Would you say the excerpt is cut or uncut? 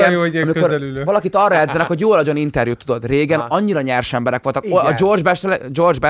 uncut